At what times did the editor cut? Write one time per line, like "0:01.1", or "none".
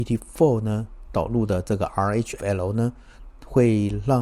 0:02.4